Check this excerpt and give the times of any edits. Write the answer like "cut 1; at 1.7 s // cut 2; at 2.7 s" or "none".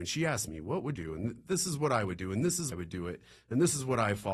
cut 1; at 1.0 s // cut 2; at 2.7 s